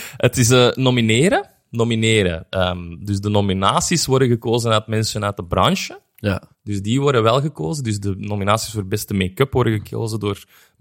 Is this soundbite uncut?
no; 1 cut; at 6.5 s

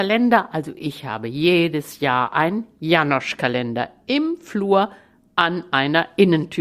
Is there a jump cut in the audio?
no; 0 cuts

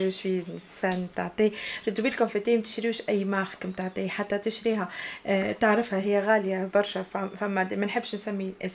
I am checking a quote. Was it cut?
no; 0 cuts

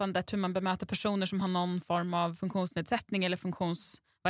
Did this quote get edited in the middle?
no; 0 cuts

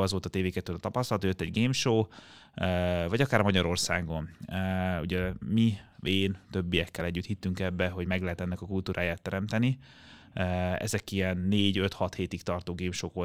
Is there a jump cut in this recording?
no; 0 cuts

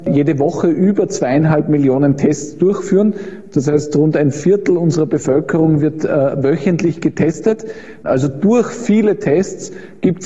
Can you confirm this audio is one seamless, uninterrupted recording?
yes; 0 cuts

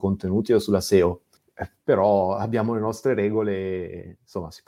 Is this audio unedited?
yes; 0 cuts

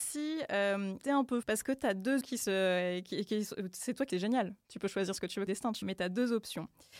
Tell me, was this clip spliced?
yes; 6 cuts; at 1.0 s, 1.4 s, 2.2 s, 4.1 s, 5.5 s, 5.8 s

